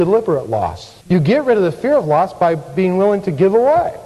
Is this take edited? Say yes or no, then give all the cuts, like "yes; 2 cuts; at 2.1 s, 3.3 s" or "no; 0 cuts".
yes; 1 cut; at 1.0 s